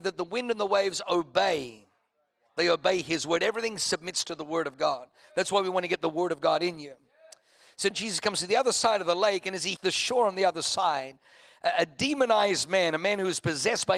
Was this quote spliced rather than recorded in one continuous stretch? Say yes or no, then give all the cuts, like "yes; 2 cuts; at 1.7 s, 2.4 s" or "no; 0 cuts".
yes; 2 cuts; at 7.9 s, 9.8 s